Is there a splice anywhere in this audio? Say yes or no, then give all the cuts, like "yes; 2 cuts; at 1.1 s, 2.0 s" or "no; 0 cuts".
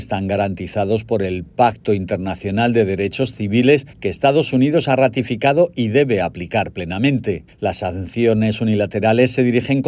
yes; 2 cuts; at 3.9 s, 7.5 s